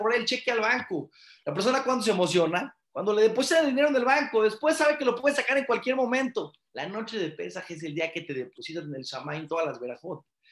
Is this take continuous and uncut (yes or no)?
yes